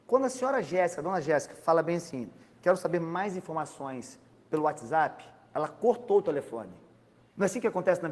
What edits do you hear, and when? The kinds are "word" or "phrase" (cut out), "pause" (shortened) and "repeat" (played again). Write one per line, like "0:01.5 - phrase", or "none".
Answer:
none